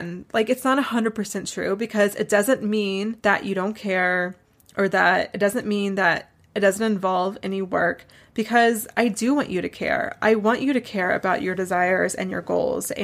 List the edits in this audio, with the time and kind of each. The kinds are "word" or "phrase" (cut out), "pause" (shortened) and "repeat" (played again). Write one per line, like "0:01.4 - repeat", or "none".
0:03.2 - pause

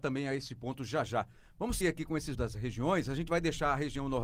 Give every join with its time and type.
0:01.8 - word
0:02.3 - word

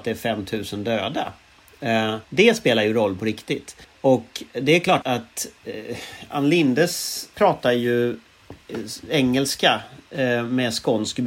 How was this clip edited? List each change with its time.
0:02.2 - pause
0:03.8 - pause
0:05.0 - word
0:07.3 - phrase

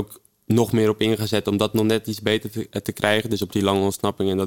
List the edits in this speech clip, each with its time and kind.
none

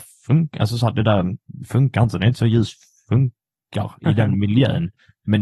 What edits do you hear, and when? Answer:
none

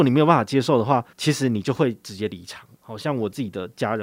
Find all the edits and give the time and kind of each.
0:01.1 - pause
0:02.7 - pause

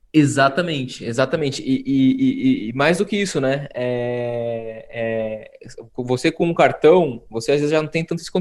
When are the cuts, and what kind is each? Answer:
none

